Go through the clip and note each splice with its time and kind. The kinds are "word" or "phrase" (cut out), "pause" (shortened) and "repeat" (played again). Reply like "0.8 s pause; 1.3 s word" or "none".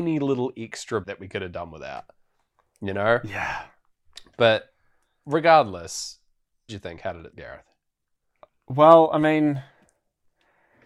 1.0 s word; 6.7 s phrase; 7.3 s word